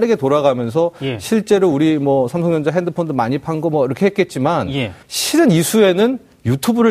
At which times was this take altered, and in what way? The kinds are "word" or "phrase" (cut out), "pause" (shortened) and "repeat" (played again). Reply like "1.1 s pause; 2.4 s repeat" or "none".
5.0 s pause